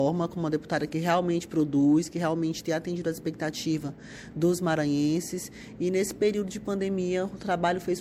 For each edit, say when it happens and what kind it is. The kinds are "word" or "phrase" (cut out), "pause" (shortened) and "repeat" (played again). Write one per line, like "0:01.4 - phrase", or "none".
none